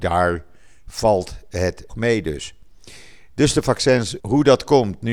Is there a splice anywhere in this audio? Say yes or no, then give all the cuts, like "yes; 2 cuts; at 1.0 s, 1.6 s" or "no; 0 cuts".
yes; 2 cuts; at 1.9 s, 4.2 s